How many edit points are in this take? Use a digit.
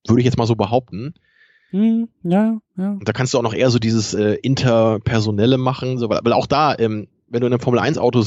0